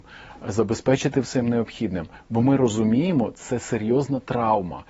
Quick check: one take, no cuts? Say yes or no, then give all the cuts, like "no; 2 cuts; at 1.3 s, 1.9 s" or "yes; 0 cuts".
yes; 0 cuts